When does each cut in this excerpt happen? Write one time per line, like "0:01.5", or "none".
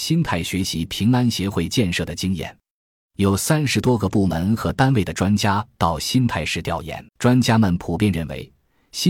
0:07.1